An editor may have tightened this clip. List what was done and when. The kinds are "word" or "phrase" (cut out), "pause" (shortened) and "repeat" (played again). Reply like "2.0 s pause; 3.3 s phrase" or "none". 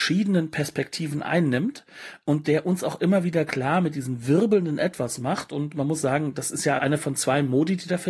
6.8 s word